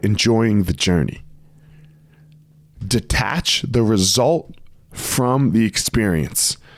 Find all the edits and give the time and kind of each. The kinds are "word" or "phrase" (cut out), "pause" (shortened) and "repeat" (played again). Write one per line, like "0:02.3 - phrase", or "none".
none